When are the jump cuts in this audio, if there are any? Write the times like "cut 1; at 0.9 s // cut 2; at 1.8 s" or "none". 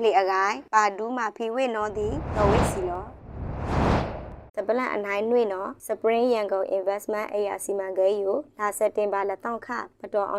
cut 1; at 4.5 s